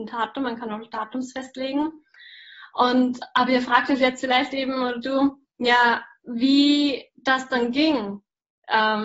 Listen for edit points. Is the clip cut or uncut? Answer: cut